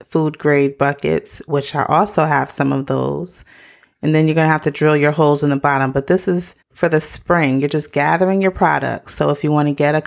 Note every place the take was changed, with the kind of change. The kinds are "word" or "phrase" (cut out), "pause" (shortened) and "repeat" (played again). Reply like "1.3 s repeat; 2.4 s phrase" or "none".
6.6 s pause

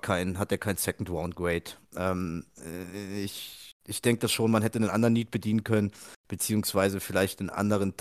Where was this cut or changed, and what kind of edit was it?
3.8 s pause

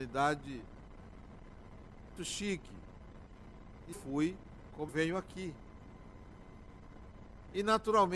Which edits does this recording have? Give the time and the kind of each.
2.2 s word; 3.9 s word; 4.9 s word

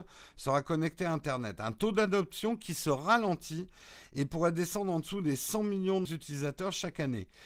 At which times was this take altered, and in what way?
6.0 s word

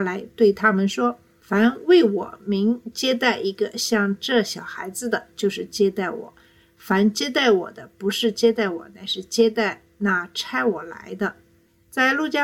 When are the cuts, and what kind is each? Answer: none

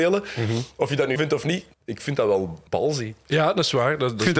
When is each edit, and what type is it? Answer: 1.2 s word; 1.7 s pause; 2.7 s pause

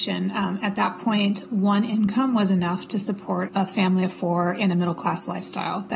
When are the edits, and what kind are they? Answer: 3.5 s word

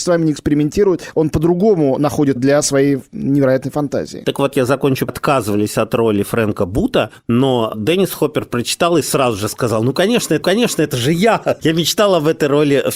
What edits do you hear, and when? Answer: 2.4 s word; 5.1 s phrase; 10.4 s repeat; 11.6 s word

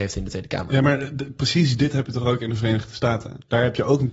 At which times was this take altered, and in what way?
none

